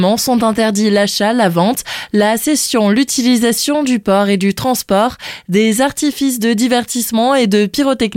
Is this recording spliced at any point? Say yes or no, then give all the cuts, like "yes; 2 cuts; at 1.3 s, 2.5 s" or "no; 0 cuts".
no; 0 cuts